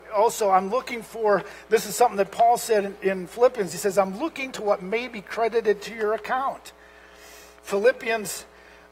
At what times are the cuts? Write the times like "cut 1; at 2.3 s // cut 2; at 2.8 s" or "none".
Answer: cut 1; at 4.5 s